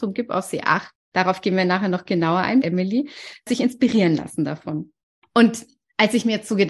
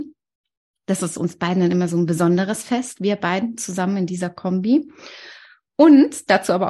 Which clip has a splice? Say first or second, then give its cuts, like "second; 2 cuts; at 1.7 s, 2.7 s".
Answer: first; 4 cuts; at 1.0 s, 2.6 s, 3.5 s, 5.0 s